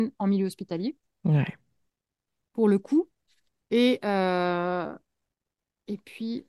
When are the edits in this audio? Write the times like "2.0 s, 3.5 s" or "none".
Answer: none